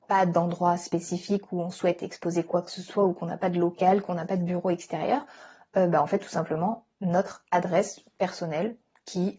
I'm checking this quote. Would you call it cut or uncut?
uncut